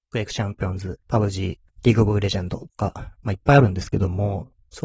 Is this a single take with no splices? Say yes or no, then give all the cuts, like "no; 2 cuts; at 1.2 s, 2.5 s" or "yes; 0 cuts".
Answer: no; 2 cuts; at 1.0 s, 3.1 s